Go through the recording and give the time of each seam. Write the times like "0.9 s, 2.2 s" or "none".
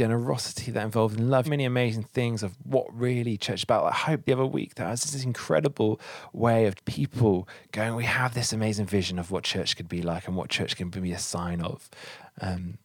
1.4 s, 4.3 s, 6.8 s